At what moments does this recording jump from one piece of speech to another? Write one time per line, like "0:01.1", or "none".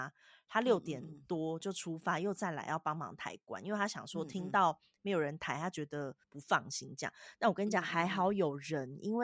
0:06.2